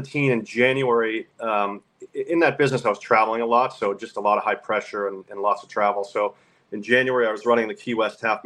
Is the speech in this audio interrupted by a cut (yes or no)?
no